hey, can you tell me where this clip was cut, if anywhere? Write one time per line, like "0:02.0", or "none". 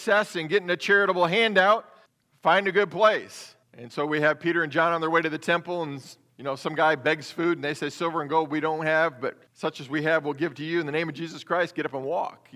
0:02.1
0:03.6
0:06.3
0:09.5